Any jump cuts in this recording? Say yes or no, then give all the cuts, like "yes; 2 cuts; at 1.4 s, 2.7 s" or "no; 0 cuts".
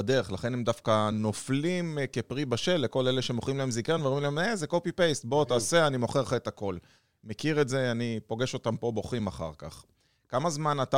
no; 0 cuts